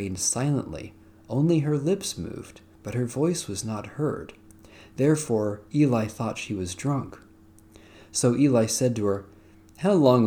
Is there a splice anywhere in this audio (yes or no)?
no